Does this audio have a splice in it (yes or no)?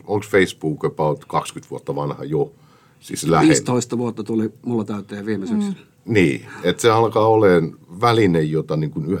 no